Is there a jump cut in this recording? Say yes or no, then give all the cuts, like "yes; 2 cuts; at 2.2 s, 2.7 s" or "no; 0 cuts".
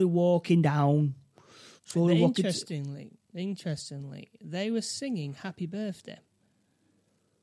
yes; 1 cut; at 1.8 s